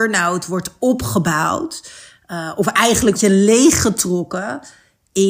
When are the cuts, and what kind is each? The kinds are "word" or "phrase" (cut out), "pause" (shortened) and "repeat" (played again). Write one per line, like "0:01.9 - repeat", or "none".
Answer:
0:03.1 - word